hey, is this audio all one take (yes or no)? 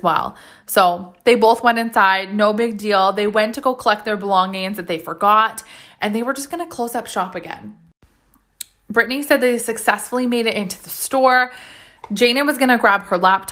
yes